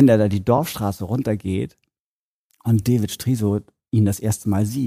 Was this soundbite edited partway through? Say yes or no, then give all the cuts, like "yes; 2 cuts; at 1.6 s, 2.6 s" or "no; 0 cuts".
no; 0 cuts